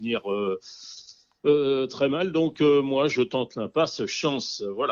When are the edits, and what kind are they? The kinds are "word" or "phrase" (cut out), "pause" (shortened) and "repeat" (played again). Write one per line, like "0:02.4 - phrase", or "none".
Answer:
none